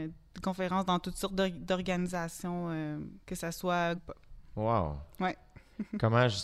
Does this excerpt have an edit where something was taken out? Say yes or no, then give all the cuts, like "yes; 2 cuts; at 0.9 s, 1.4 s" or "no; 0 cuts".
yes; 2 cuts; at 3.2 s, 4.0 s